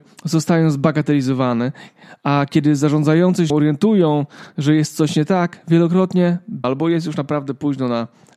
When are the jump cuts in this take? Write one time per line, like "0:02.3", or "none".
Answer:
0:03.5
0:06.6